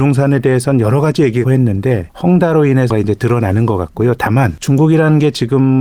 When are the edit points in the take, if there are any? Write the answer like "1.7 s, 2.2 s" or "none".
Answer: 1.4 s, 2.9 s